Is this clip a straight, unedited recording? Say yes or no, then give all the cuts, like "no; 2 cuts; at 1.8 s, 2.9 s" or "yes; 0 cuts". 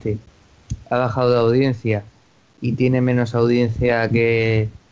yes; 0 cuts